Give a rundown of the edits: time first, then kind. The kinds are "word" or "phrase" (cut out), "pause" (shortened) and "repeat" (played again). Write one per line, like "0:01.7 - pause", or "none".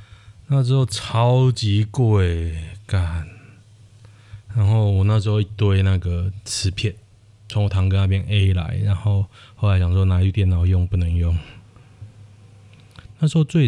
none